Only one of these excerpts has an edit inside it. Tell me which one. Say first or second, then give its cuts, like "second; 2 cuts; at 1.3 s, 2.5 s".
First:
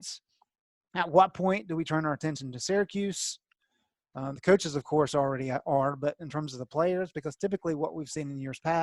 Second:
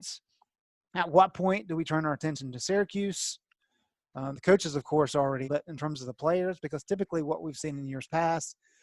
second; 1 cut; at 5.4 s